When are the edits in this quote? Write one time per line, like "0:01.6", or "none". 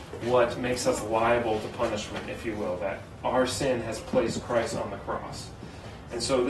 none